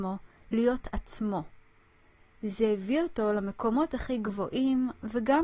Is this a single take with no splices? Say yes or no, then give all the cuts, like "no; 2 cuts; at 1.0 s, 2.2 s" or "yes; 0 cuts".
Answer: yes; 0 cuts